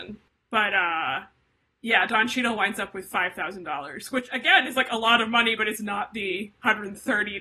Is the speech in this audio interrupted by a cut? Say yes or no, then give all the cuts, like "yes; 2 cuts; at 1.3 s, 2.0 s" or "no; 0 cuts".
no; 0 cuts